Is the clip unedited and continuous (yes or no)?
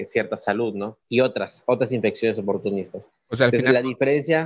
no